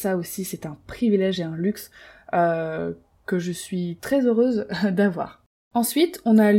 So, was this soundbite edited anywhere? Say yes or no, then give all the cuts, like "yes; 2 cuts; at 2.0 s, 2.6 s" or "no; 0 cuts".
no; 0 cuts